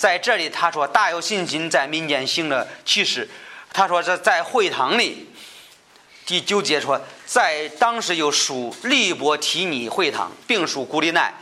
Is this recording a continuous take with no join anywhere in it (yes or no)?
yes